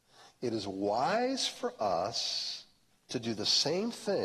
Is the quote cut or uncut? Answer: cut